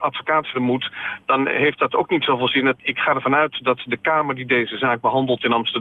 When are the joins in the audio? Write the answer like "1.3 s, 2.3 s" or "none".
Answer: 2.8 s